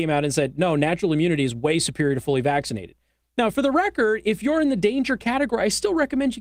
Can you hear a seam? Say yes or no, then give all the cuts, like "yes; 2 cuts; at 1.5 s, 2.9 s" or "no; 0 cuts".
no; 0 cuts